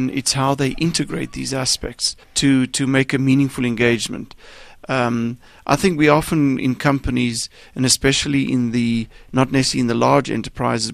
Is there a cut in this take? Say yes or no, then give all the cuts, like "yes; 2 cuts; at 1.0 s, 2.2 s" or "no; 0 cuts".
yes; 1 cut; at 2.2 s